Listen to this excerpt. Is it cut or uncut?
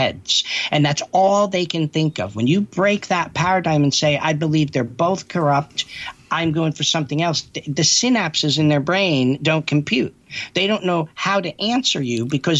uncut